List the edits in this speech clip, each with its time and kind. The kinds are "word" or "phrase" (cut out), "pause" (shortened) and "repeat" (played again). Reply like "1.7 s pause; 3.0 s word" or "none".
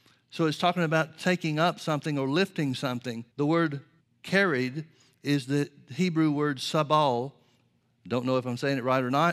3.3 s pause; 4.0 s pause

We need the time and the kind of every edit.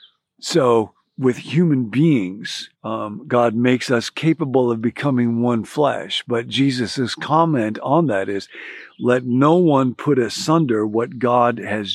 2.7 s pause

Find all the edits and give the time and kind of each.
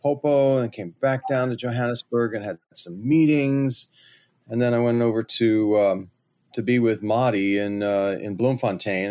none

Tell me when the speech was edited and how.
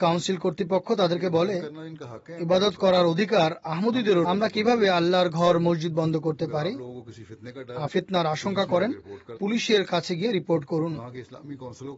4.2 s word; 7.9 s phrase; 9.4 s word

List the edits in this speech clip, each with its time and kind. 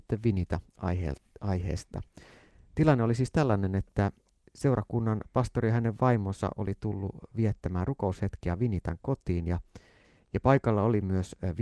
none

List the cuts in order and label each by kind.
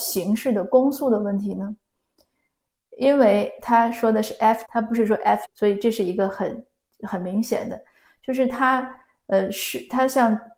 4.6 s word; 5.4 s word

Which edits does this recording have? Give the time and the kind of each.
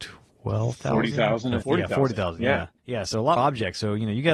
1.6 s word; 2.8 s pause; 3.4 s word

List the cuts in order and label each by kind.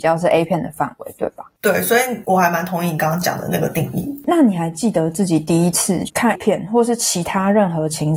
6.3 s word

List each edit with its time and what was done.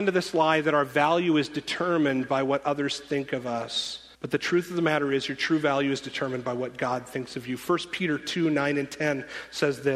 4.1 s pause

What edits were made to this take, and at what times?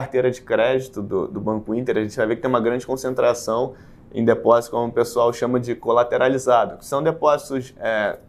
none

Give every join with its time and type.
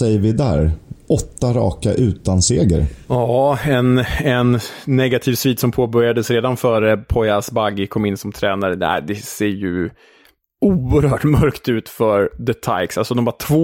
3.0 s pause

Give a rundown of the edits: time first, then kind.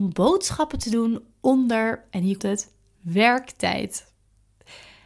2.4 s word

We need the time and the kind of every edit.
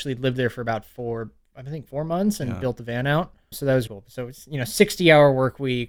3.5 s word; 3.9 s word

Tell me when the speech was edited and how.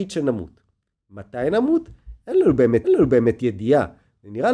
2.8 s repeat

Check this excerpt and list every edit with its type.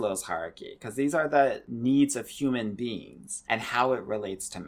none

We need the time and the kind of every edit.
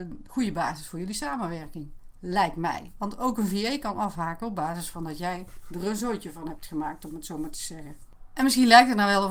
none

